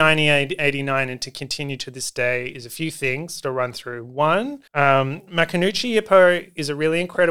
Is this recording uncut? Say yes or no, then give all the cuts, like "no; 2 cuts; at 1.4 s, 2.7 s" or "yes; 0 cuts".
no; 1 cut; at 4.7 s